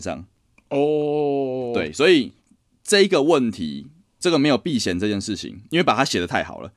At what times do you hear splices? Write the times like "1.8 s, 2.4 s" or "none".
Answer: none

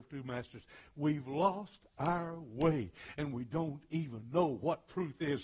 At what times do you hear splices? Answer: none

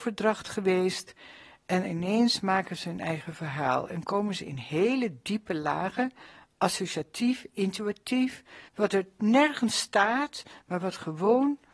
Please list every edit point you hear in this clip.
8.7 s

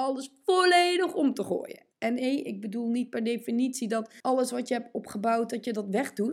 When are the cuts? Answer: 1.9 s, 4.2 s

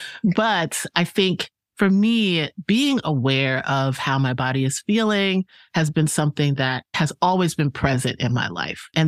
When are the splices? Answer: none

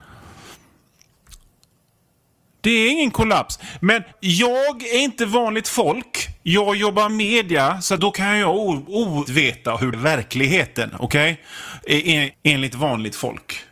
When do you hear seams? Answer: 4.1 s, 7.1 s, 8.0 s, 9.3 s, 9.9 s, 12.3 s

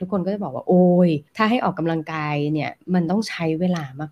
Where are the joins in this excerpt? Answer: 1.3 s

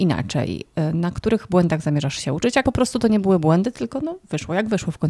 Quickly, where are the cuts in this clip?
2.6 s

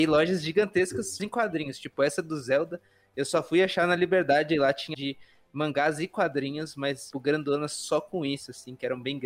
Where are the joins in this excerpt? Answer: 1.2 s, 4.9 s, 7.1 s

